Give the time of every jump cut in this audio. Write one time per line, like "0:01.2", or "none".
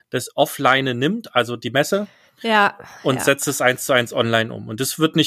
none